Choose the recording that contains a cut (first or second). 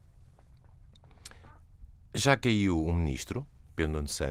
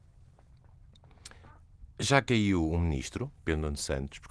second